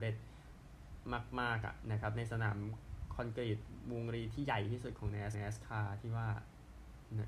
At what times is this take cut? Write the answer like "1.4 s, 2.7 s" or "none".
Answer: 5.3 s